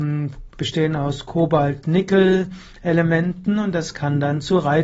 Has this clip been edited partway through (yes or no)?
no